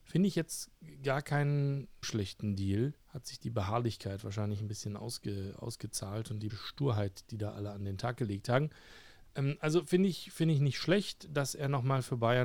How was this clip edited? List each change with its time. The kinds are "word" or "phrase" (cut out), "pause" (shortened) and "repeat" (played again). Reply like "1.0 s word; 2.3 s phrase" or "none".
2.0 s word; 3.0 s pause; 6.5 s word